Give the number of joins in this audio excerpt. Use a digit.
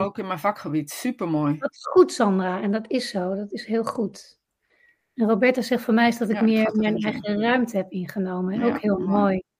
0